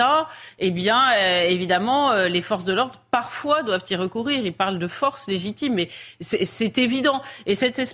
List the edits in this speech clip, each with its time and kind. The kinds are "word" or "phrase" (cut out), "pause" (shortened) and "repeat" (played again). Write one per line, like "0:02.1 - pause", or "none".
none